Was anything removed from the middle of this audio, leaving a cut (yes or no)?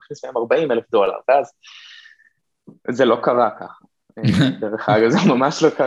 no